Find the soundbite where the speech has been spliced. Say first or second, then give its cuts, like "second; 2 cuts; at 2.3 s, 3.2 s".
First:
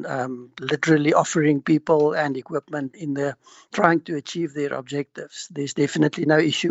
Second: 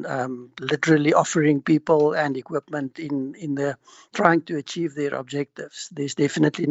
first; 1 cut; at 2.9 s